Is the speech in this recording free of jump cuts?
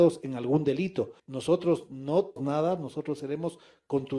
no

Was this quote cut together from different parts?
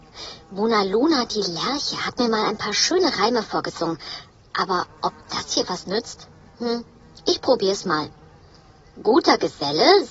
no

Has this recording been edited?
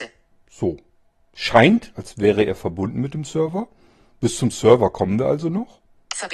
no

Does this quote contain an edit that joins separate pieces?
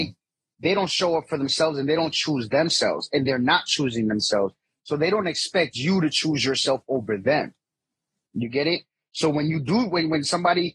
no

